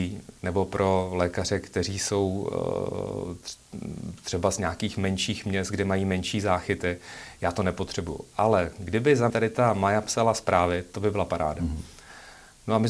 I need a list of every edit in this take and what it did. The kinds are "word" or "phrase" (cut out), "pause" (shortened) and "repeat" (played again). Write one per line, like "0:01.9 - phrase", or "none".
0:09.3 - word